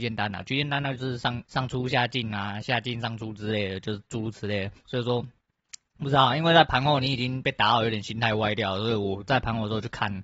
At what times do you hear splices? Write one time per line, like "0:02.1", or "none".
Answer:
0:01.5
0:04.8